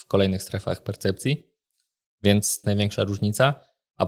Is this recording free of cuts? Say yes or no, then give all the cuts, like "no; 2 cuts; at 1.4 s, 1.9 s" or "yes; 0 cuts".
no; 1 cut; at 2.6 s